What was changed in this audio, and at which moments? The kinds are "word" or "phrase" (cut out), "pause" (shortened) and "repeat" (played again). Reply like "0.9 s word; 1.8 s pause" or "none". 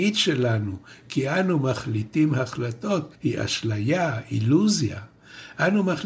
3.1 s pause

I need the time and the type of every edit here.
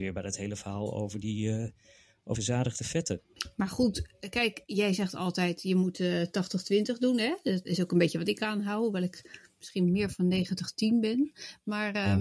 2.3 s word; 7.6 s word

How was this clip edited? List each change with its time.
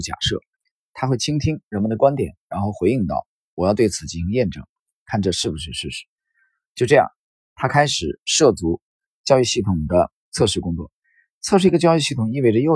10.2 s pause

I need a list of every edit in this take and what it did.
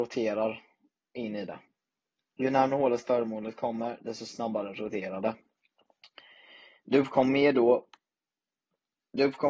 none

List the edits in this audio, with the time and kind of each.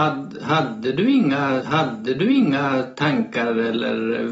1.6 s repeat

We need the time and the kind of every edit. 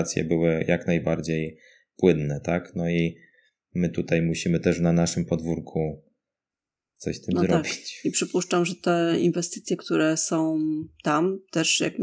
none

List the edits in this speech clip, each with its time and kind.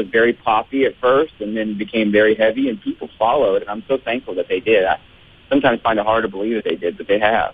none

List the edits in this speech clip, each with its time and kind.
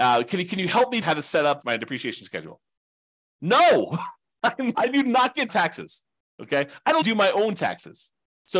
1.0 s word; 1.6 s word; 4.7 s word; 5.5 s phrase; 7.0 s word

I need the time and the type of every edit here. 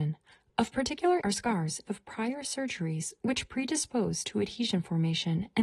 1.2 s word; 1.9 s word

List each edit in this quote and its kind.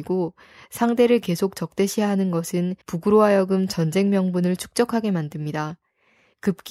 2.8 s pause

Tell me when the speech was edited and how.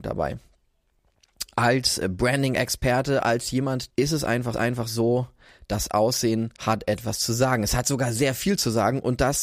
3.9 s phrase; 4.5 s repeat; 6.6 s pause

